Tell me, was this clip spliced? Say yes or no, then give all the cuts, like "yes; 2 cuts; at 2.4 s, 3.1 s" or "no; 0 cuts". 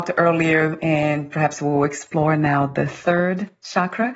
no; 0 cuts